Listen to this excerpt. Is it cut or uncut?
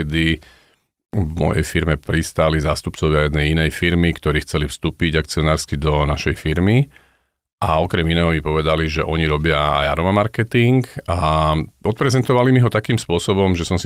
uncut